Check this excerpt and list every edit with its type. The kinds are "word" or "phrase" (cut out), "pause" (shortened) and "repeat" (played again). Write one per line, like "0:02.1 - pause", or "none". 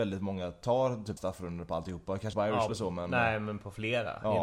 0:01.2 - word
0:02.3 - word
0:02.7 - word